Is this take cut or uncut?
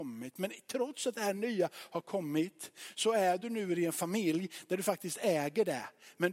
uncut